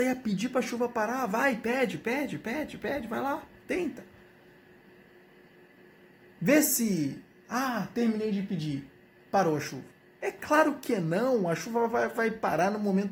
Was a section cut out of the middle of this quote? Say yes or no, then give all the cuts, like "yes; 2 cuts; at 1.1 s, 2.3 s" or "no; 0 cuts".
no; 0 cuts